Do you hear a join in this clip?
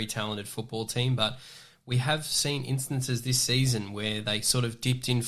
no; 0 cuts

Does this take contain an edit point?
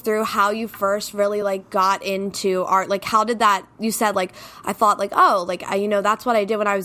no; 0 cuts

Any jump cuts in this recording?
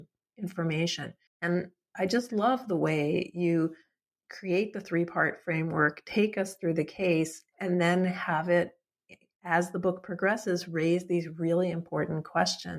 yes; 1 cut; at 1.3 s

